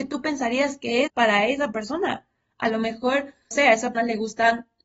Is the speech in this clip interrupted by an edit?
yes; 3 cuts; at 1.1 s, 3.5 s, 3.9 s

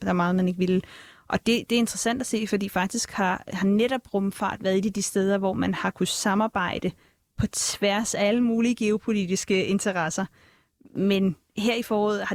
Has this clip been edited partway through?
no; 0 cuts

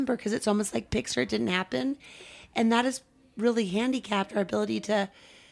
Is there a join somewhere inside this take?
no; 0 cuts

